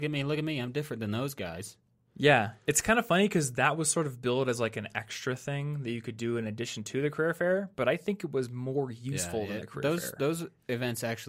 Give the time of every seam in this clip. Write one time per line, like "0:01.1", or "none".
none